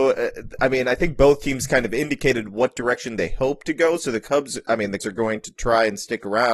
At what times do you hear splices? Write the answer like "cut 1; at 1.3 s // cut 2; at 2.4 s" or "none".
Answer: cut 1; at 5.0 s